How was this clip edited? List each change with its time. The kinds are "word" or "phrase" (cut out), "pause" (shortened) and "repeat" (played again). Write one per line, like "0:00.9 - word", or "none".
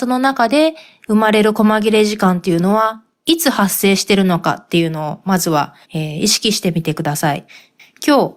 0:05.8 - pause